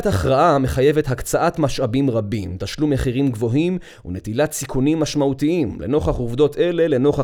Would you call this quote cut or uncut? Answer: uncut